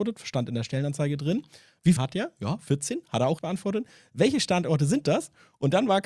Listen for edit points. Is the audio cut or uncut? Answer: cut